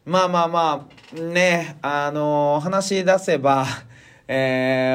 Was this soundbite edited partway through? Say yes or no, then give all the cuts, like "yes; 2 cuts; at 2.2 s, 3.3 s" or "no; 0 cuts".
no; 0 cuts